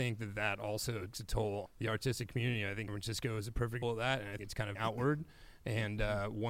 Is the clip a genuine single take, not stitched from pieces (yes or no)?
no